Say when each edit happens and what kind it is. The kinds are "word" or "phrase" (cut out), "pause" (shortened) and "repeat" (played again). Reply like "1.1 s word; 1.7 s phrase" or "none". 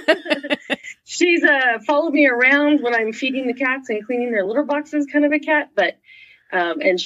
none